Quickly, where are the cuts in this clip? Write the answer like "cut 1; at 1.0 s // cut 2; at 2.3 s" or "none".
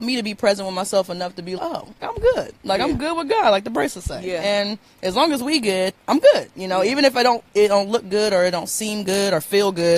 cut 1; at 1.6 s // cut 2; at 2.0 s // cut 3; at 5.9 s